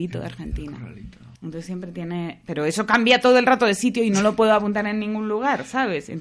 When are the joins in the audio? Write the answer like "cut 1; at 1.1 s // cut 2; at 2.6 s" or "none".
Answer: cut 1; at 1.3 s